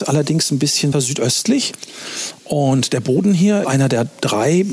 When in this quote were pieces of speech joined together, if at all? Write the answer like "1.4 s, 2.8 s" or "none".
0.9 s, 3.6 s